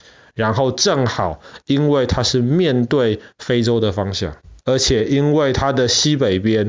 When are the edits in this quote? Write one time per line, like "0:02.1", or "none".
0:04.6